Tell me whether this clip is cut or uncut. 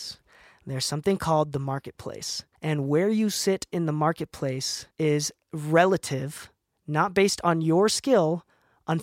cut